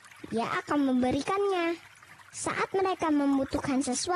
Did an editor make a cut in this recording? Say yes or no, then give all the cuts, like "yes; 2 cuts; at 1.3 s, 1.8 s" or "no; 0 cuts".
no; 0 cuts